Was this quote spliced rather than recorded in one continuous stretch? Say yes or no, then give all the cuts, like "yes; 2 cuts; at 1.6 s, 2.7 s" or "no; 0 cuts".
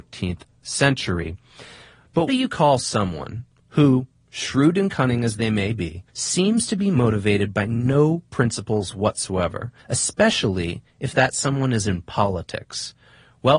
yes; 3 cuts; at 2.3 s, 6.1 s, 9.8 s